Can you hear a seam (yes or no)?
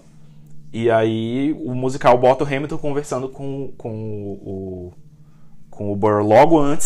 no